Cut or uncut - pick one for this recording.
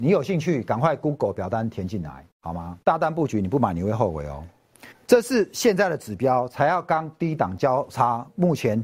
cut